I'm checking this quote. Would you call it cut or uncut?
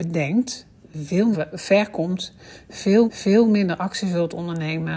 cut